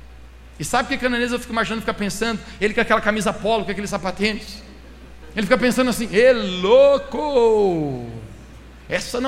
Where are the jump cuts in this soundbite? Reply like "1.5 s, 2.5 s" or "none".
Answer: none